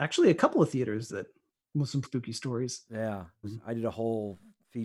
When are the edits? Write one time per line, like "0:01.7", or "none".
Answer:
0:01.1
0:02.0
0:03.4